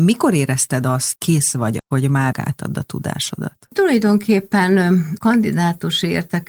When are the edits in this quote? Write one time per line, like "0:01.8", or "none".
0:01.2
0:01.8
0:02.3
0:05.2

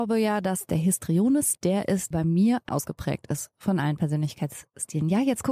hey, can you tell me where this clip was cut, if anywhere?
0:01.6
0:02.1
0:02.7

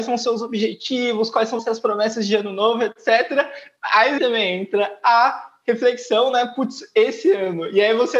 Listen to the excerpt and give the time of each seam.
0:01.6
0:04.2

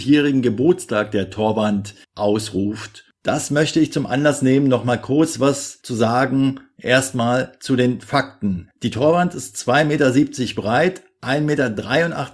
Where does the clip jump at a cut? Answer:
0:02.0

